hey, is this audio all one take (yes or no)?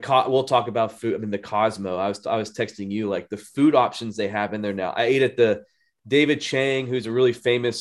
yes